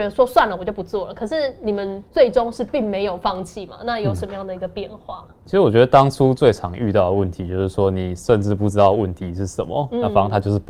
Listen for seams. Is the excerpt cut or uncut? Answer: cut